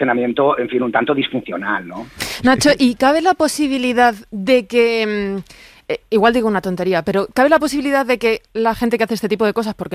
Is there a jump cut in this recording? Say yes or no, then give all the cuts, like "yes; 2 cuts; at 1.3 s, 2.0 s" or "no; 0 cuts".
no; 0 cuts